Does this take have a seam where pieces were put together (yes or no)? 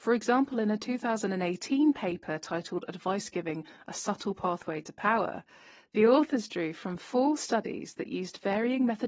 no